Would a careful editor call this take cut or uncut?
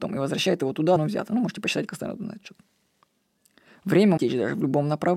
cut